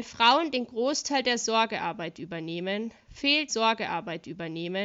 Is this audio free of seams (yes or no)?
no